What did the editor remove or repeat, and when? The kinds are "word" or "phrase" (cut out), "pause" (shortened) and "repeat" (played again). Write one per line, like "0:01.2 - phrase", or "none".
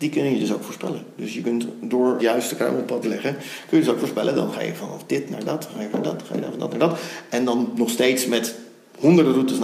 0:02.2 - word
0:03.0 - word
0:05.9 - word